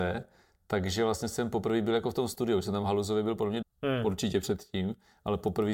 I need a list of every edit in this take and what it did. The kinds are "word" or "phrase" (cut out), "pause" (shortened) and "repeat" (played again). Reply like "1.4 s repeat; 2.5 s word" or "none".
3.6 s word